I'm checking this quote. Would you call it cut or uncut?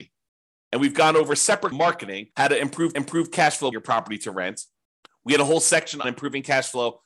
cut